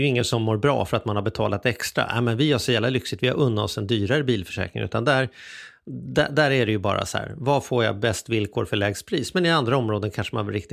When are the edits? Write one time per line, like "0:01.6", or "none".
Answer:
none